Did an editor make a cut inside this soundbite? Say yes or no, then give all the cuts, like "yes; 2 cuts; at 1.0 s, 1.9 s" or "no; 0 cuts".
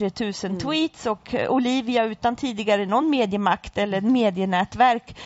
no; 0 cuts